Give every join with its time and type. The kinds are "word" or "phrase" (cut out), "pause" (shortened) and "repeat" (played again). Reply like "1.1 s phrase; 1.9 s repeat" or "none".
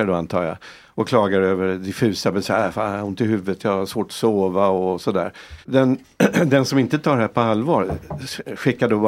5.6 s pause

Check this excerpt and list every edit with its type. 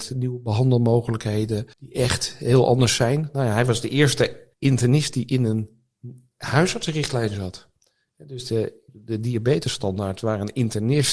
1.7 s pause; 4.5 s pause; 8.9 s pause

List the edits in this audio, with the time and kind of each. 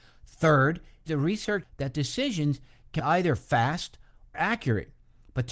1.1 s word; 1.6 s word; 3.0 s word; 4.3 s word

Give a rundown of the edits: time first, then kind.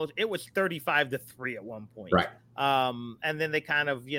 2.4 s pause

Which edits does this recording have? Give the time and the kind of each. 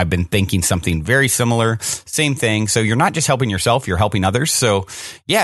none

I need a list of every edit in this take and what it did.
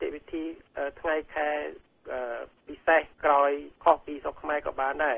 3.1 s pause; 3.8 s pause

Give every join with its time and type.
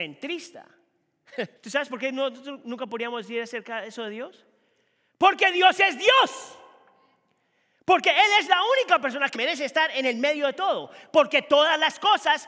1.6 s pause; 9.3 s word

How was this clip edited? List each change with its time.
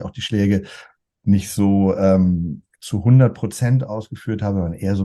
none

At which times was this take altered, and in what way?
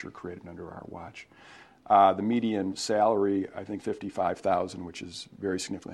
3.8 s phrase

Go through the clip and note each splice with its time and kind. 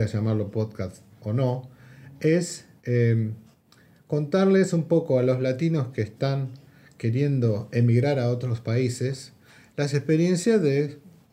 none

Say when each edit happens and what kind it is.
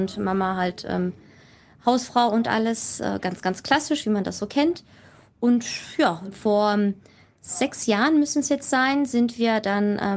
none

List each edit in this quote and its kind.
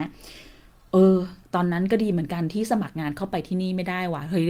1.4 s pause

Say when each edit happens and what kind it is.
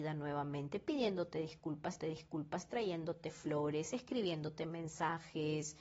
2.0 s repeat

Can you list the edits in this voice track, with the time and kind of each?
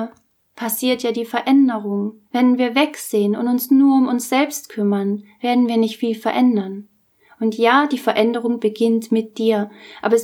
2.3 s pause

